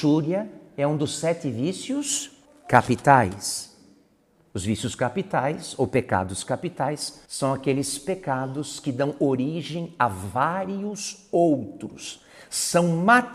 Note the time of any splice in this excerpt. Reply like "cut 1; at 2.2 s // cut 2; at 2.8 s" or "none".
cut 1; at 2.4 s // cut 2; at 7.3 s